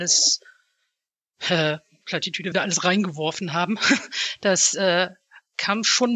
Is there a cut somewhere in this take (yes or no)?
yes